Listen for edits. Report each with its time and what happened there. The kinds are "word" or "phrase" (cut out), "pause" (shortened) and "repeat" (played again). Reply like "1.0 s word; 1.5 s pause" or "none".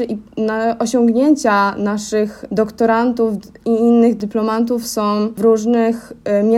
none